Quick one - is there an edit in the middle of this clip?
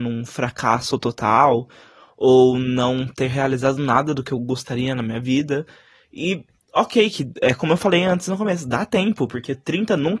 no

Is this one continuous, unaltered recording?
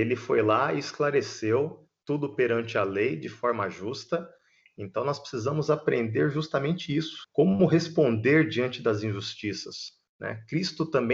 yes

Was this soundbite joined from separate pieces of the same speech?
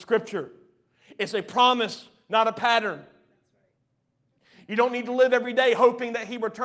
no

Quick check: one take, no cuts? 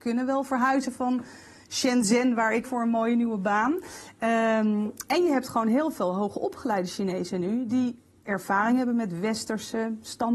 no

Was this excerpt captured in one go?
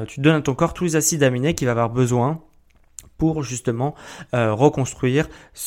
yes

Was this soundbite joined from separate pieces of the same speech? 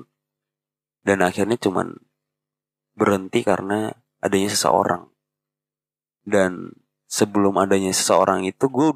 no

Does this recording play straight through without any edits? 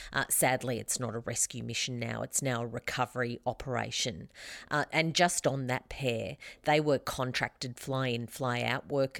yes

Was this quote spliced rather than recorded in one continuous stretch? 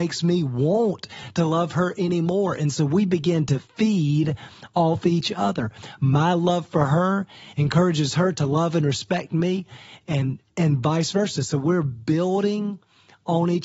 no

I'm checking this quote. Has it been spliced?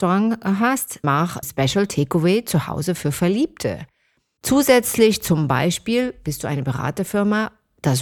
yes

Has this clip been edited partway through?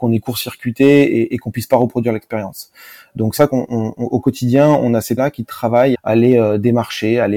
yes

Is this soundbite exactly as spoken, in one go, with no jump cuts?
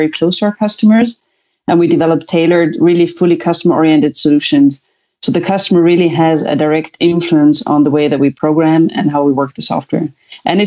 yes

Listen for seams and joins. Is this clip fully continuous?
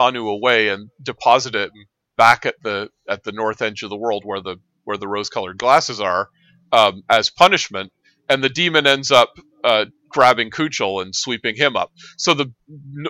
yes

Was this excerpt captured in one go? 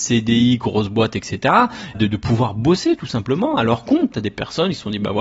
no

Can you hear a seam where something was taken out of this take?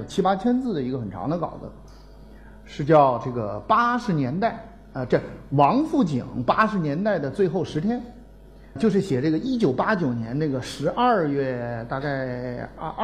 yes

